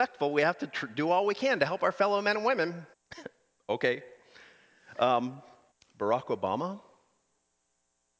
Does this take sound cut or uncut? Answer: cut